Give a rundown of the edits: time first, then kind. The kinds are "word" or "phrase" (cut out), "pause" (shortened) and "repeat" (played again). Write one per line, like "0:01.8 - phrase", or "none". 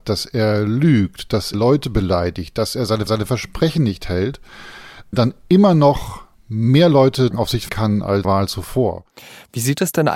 0:01.5 - word
0:03.1 - repeat
0:07.3 - word
0:07.7 - word
0:08.2 - phrase